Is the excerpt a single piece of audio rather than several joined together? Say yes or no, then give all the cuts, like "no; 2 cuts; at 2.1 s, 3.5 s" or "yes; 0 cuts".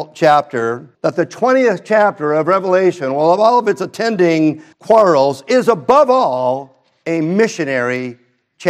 no; 2 cuts; at 0.9 s, 4.7 s